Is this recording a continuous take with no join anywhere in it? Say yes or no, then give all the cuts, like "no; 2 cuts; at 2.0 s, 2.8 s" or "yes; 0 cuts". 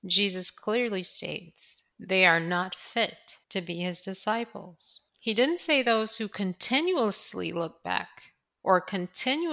no; 3 cuts; at 1.9 s, 3.4 s, 5.1 s